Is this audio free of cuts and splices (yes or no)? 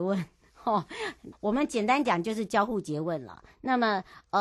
no